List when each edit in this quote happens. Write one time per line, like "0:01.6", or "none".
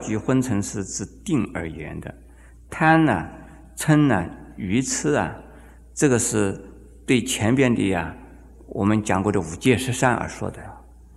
none